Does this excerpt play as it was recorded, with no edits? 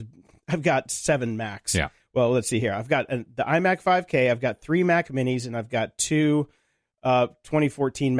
yes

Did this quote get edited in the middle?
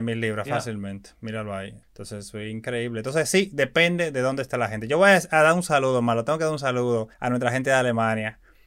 yes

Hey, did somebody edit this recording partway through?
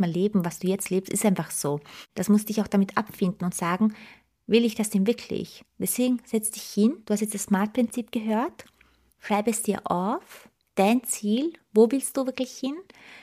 no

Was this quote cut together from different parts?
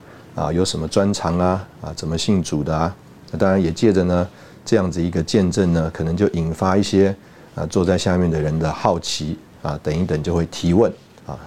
no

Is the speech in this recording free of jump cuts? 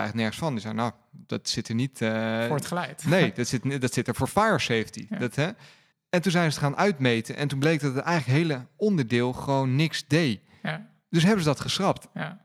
yes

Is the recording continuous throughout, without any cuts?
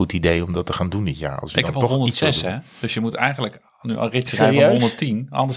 yes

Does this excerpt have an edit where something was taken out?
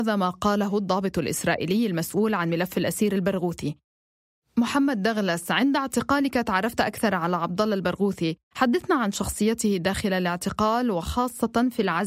no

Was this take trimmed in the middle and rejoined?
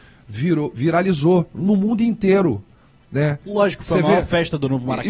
no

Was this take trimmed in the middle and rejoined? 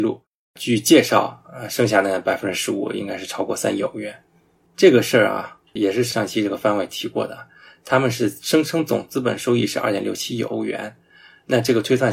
no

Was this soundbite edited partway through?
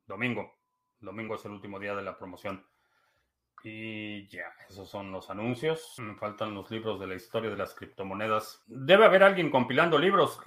no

